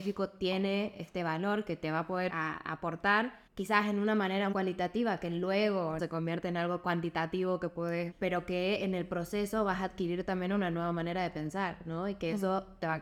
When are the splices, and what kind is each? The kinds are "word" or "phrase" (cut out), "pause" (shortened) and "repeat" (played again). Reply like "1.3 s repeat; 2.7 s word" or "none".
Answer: 2.3 s word; 3.5 s pause; 4.5 s word; 6.0 s phrase; 8.1 s word